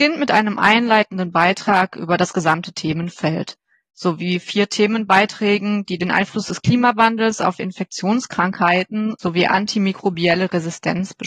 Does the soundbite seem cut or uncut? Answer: uncut